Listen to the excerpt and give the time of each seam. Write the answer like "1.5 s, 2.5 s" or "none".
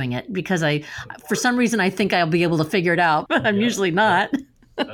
3.3 s

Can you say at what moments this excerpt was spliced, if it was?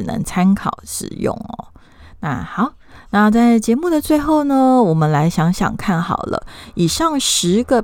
none

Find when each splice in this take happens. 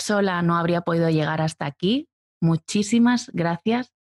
none

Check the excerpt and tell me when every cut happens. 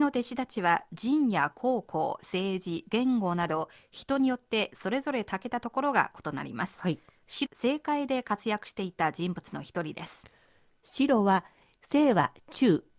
7.5 s

